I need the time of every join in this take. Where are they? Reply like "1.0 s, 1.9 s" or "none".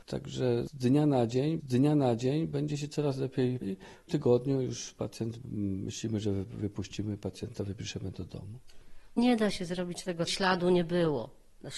1.6 s, 3.6 s, 4.1 s, 9.2 s, 10.3 s